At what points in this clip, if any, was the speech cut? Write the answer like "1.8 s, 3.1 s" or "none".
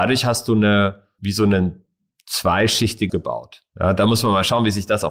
1.2 s, 3.1 s